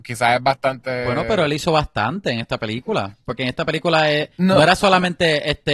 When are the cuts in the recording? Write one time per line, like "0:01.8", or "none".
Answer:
none